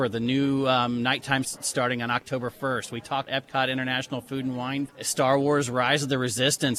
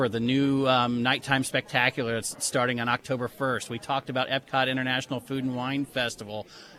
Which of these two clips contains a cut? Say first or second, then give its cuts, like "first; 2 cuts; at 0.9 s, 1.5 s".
first; 3 cuts; at 1.4 s, 3.3 s, 4.9 s